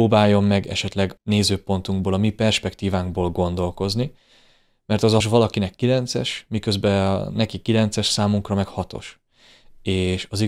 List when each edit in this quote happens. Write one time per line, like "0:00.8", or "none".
0:01.2
0:05.2